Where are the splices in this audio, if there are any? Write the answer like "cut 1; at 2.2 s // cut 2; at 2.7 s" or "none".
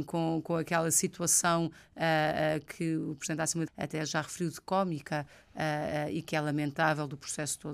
cut 1; at 3.7 s